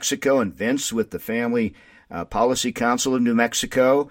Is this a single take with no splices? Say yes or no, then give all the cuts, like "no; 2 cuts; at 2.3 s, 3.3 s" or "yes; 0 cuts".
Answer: yes; 0 cuts